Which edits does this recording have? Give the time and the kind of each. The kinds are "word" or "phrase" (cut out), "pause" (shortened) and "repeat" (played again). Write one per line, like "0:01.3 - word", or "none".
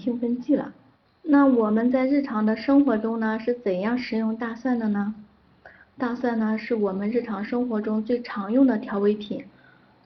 none